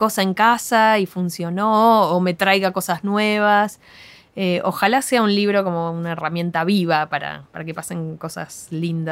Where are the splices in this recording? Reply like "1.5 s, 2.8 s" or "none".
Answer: none